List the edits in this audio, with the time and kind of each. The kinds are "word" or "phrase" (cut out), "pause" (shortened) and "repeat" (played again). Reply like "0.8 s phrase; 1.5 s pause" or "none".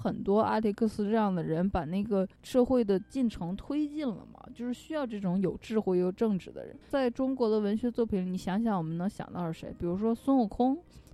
6.8 s pause